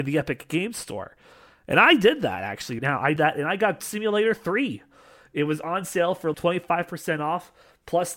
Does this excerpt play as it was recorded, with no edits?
no; 4 cuts; at 2.8 s, 3.2 s, 3.8 s, 6.3 s

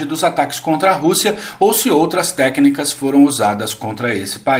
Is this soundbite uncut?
yes; 0 cuts

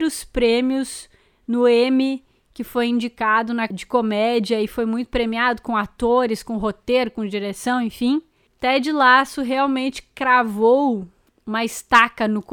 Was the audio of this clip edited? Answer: yes; 1 cut; at 3.7 s

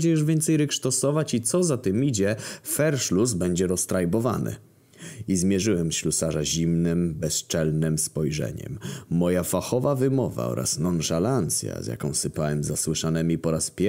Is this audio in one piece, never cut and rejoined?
yes; 0 cuts

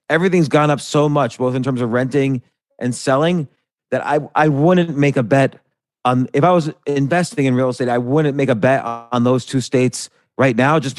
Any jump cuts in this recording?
no; 0 cuts

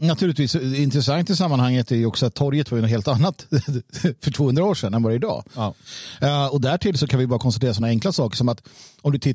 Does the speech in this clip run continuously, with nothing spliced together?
yes; 0 cuts

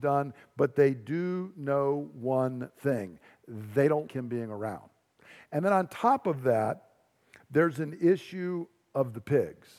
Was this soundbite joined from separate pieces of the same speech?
yes; 1 cut; at 4.1 s

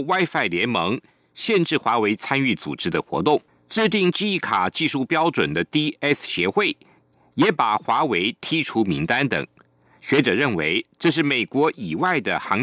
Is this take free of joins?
no; 1 cut; at 3.5 s

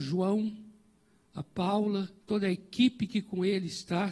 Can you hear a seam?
yes; 1 cut; at 2.2 s

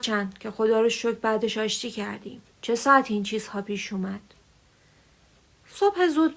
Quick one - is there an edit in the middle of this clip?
yes; 1 cut; at 2.5 s

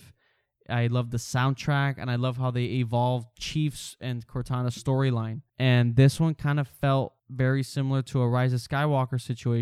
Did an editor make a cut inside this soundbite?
yes; 2 cuts; at 5.5 s, 7.2 s

